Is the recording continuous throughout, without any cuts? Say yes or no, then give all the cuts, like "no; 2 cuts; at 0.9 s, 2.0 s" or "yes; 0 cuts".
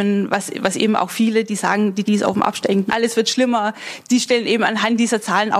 no; 2 cuts; at 2.1 s, 2.9 s